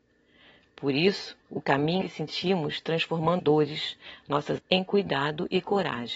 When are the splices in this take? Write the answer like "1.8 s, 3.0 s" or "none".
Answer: 1.4 s, 2.0 s, 3.4 s, 4.6 s

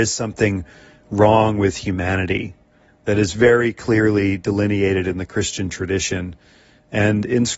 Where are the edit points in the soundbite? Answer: none

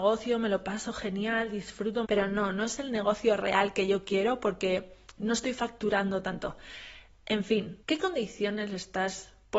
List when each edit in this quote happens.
2.0 s, 7.8 s

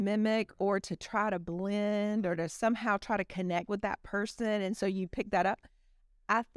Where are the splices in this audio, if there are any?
none

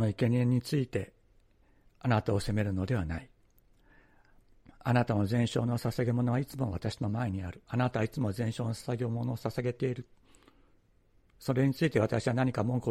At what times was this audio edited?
none

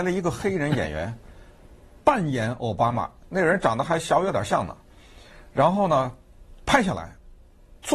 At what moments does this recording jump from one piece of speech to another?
3.2 s, 6.6 s

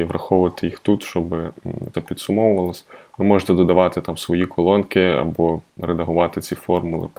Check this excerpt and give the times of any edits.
1.9 s, 5.7 s

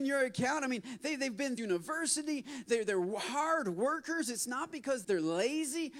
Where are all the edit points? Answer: 1.6 s, 5.0 s

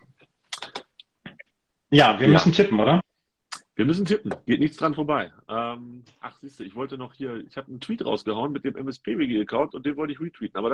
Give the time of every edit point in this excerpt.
none

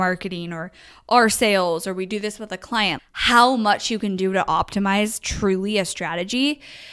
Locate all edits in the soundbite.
3.0 s

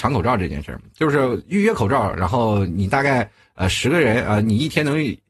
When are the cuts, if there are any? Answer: none

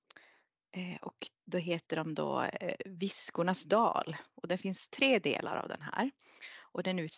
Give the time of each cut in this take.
1.3 s

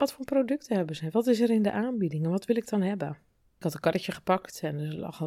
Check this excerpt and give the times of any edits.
none

